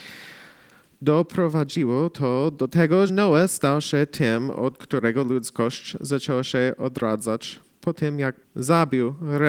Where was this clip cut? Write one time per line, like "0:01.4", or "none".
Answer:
0:03.1
0:08.4